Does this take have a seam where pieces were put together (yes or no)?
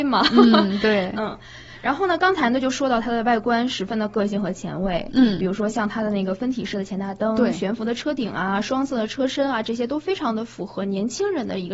no